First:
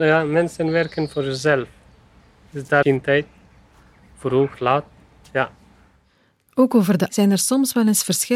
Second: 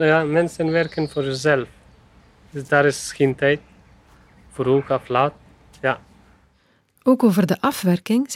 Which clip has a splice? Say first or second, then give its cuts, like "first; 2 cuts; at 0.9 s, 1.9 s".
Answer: first; 3 cuts; at 2.8 s, 4.5 s, 7.1 s